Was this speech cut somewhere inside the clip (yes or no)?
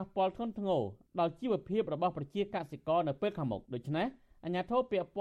yes